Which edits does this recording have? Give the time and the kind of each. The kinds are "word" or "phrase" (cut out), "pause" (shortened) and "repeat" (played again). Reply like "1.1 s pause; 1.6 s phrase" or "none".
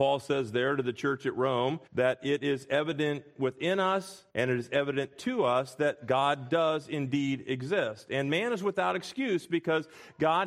1.9 s pause; 4.3 s pause

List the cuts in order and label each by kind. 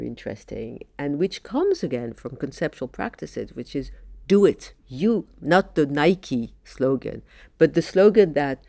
4.8 s pause

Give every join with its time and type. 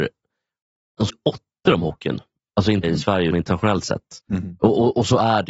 1.1 s word; 2.8 s word; 3.3 s word

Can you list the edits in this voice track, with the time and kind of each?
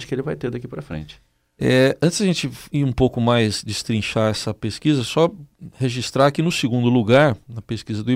none

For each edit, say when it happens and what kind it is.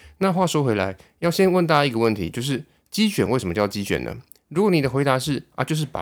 none

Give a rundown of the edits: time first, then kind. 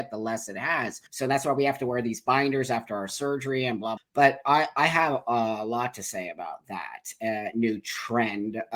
1.1 s pause; 4.0 s phrase

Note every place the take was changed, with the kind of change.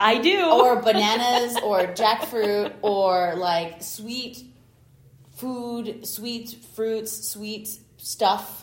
none

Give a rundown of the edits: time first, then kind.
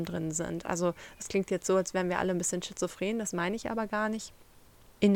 none

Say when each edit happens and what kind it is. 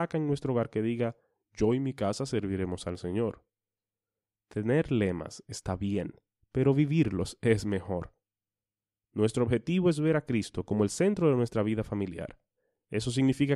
none

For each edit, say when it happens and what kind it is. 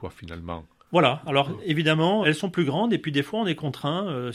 2.2 s word

